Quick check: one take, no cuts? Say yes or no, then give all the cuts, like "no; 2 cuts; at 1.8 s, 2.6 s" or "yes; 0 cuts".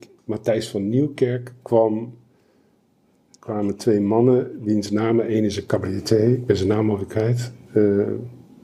yes; 0 cuts